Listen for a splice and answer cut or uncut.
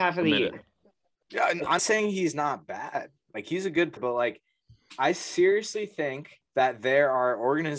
cut